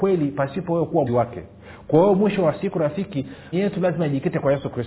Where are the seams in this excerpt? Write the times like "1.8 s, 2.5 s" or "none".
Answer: 1.1 s, 3.5 s